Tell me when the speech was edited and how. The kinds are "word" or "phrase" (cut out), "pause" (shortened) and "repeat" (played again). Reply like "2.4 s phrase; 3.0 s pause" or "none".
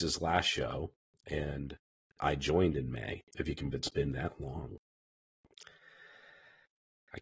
3.3 s pause; 3.7 s word